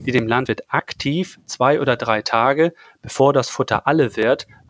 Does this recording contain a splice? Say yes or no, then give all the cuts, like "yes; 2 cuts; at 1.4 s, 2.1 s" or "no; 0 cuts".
no; 0 cuts